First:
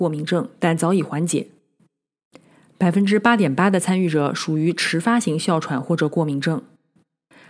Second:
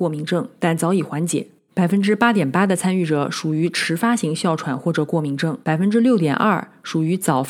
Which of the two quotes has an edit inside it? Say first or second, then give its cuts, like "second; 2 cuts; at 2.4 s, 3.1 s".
second; 2 cuts; at 1.7 s, 5.6 s